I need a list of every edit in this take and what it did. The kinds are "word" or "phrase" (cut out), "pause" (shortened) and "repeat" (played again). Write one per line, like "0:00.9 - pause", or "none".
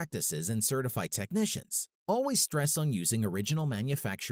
0:02.0 - pause